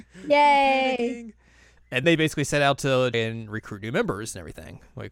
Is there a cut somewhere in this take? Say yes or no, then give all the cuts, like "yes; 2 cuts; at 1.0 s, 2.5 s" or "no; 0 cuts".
yes; 2 cuts; at 2.0 s, 3.1 s